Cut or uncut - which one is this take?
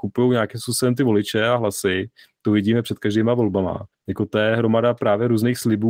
cut